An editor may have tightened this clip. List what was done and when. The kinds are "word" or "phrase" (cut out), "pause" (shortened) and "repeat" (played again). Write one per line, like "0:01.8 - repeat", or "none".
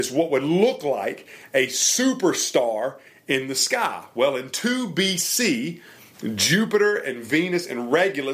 none